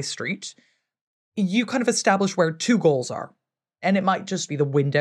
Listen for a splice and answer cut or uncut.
uncut